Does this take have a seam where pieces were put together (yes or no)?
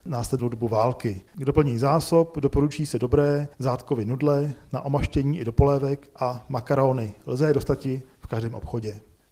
yes